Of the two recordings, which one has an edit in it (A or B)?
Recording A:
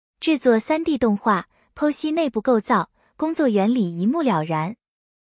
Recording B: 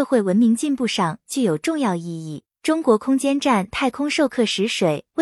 B